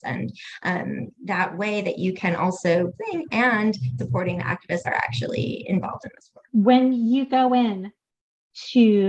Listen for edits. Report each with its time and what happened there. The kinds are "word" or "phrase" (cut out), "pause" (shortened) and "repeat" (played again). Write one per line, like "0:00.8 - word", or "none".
0:01.1 - pause
0:02.9 - phrase
0:04.0 - word
0:04.8 - word
0:06.5 - pause